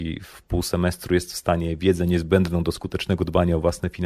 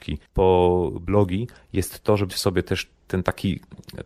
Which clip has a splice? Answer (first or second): second